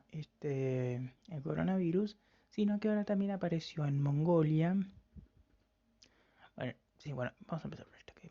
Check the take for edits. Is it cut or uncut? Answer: cut